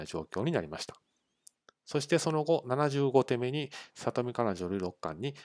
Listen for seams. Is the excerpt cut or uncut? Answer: uncut